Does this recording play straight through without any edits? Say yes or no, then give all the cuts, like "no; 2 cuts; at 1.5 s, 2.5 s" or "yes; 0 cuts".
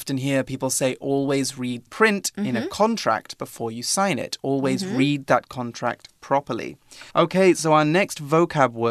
no; 2 cuts; at 1.9 s, 7.1 s